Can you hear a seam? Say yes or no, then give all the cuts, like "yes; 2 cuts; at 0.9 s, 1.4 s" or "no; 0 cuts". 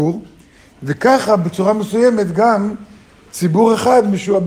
no; 0 cuts